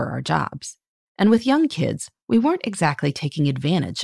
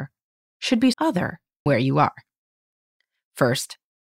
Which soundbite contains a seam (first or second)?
second